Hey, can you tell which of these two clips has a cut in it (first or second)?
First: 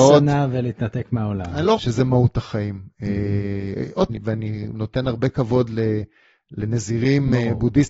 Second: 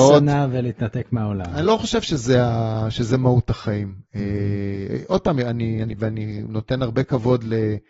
first